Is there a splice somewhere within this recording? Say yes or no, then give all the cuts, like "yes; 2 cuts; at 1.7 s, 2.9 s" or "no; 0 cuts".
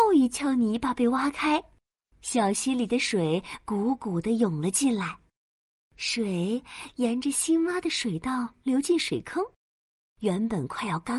no; 0 cuts